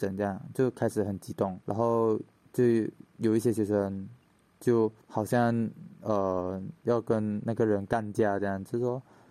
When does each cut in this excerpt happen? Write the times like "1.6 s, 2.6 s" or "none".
1.6 s, 5.0 s